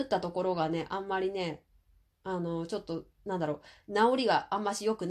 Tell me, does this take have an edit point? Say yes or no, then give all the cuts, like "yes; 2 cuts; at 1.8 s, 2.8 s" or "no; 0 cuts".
yes; 1 cut; at 3.1 s